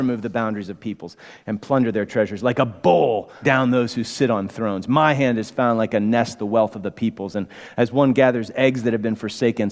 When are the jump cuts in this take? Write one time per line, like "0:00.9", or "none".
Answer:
0:03.4